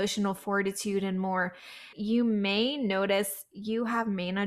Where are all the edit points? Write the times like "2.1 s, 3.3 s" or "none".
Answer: 1.9 s